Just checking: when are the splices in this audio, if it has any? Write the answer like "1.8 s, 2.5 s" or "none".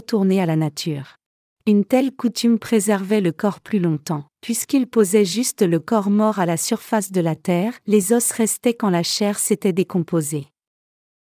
1.5 s, 4.3 s, 7.8 s

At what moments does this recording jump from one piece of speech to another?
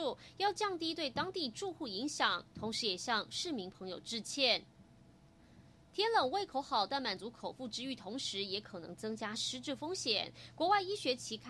none

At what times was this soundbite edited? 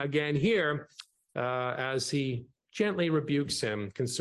none

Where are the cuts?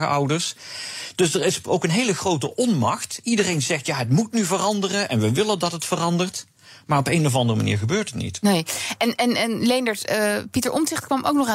none

